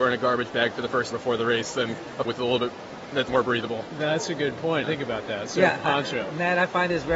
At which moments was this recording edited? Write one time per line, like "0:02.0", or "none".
0:01.1
0:02.2
0:03.3
0:04.8